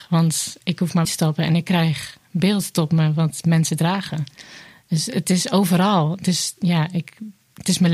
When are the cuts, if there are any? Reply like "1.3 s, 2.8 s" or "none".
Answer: 1.0 s